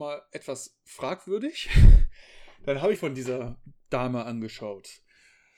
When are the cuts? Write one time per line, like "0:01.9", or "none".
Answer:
0:02.9